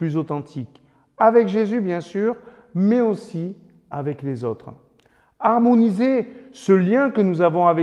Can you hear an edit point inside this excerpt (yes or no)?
no